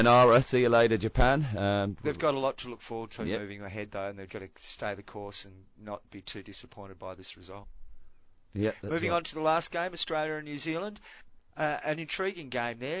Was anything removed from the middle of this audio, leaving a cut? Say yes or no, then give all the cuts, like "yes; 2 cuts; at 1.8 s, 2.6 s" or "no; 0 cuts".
yes; 1 cut; at 4.3 s